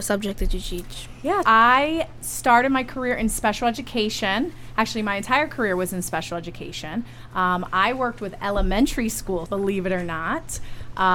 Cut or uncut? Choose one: cut